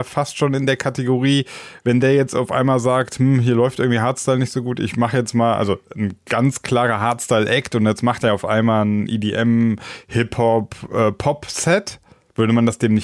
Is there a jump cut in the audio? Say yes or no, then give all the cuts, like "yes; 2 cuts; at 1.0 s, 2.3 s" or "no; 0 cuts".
no; 0 cuts